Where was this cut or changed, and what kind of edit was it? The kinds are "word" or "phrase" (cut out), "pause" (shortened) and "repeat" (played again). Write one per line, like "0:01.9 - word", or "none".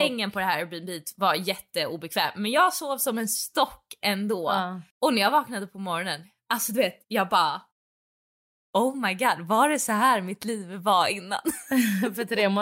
0:04.9 - pause
0:07.0 - pause